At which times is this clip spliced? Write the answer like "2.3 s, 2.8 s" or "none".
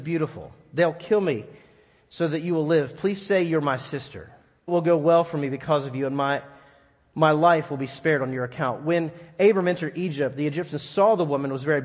4.7 s